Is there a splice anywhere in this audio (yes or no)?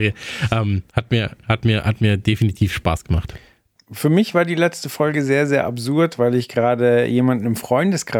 no